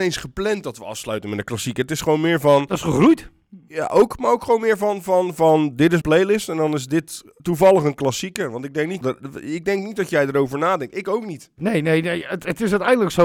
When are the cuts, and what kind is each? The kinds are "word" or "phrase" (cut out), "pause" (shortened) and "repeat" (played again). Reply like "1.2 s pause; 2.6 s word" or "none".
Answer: 6.0 s word; 7.4 s pause; 9.0 s phrase